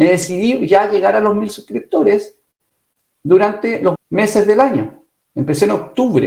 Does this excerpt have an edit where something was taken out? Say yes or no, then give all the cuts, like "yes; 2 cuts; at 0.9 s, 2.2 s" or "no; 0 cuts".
yes; 1 cut; at 4.0 s